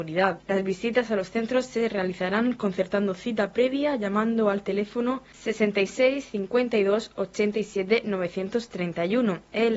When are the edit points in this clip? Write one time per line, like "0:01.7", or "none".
none